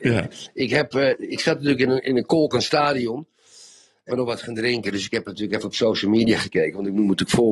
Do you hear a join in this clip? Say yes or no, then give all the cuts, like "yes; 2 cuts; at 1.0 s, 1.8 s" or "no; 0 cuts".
yes; 2 cuts; at 2.0 s, 4.1 s